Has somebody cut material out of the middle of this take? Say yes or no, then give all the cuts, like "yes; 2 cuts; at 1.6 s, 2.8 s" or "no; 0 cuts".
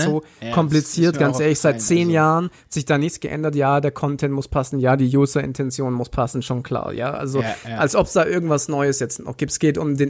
no; 0 cuts